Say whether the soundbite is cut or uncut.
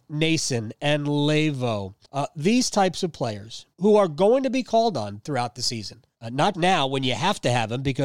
cut